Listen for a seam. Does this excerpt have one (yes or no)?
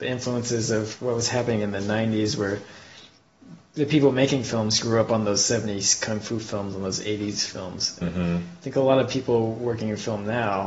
yes